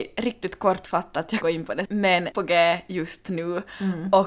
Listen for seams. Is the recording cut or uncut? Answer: cut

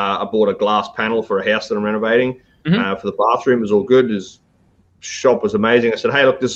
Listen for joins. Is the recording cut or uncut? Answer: uncut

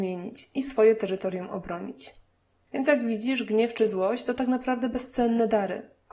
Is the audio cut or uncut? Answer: uncut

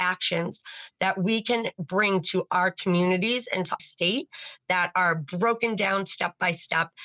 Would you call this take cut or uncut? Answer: cut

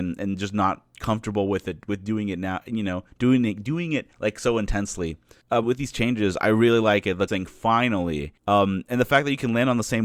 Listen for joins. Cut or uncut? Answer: cut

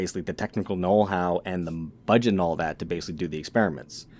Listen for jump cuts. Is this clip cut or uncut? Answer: uncut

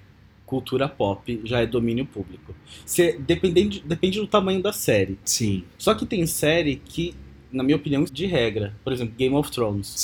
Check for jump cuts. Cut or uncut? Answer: cut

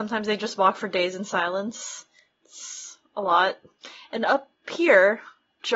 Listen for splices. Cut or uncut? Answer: uncut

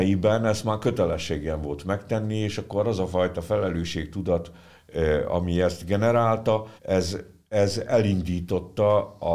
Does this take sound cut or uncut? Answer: cut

